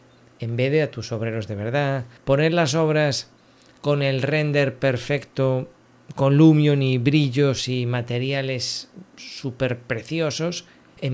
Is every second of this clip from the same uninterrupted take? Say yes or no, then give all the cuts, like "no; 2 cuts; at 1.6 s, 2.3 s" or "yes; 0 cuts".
no; 1 cut; at 2.2 s